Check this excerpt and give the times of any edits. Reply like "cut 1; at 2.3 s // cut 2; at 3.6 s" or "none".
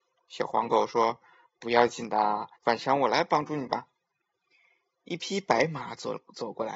cut 1; at 2.6 s // cut 2; at 4.0 s